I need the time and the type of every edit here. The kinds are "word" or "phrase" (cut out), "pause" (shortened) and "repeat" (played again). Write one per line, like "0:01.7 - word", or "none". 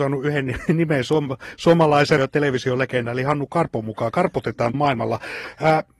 0:02.2 - word
0:04.7 - word

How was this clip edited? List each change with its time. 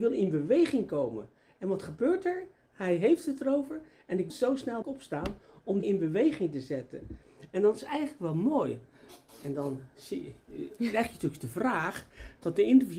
0:04.3 - word
0:04.8 - word
0:05.8 - word

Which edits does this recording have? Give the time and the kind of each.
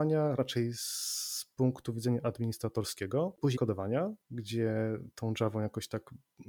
0:03.6 - word
0:04.2 - pause

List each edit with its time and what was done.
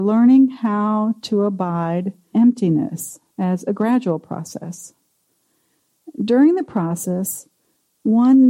0:02.3 - word
0:03.3 - pause

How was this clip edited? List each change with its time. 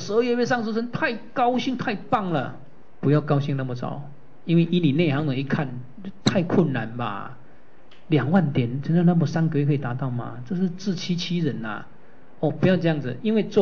none

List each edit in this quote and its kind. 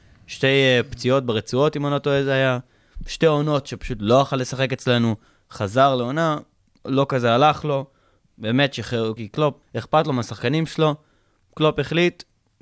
0:09.2 - phrase
0:09.6 - word

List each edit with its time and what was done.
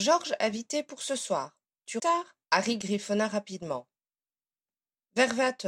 0:02.0 - word
0:02.4 - pause

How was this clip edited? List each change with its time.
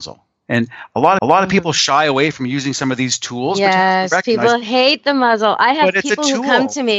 0:01.2 - repeat

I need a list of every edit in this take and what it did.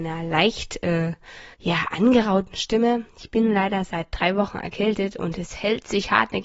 0:01.5 - pause

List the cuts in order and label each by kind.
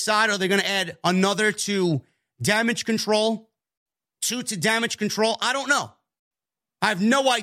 none

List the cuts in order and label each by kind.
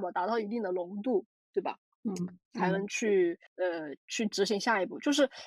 0:03.5 - pause

